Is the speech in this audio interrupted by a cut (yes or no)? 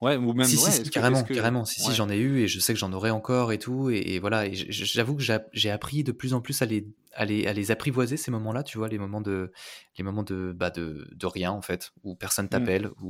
yes